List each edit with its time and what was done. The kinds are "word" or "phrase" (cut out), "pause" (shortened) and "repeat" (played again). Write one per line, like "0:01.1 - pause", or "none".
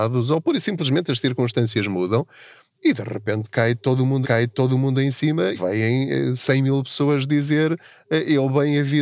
0:04.2 - repeat
0:05.5 - word